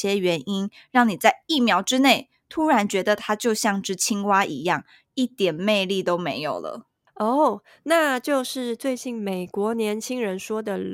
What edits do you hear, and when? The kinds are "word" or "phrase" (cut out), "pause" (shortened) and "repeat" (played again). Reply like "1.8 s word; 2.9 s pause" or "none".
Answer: none